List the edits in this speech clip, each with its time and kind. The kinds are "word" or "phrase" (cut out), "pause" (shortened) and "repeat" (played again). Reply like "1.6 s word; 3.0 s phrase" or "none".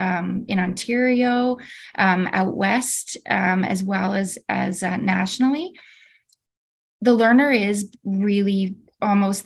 none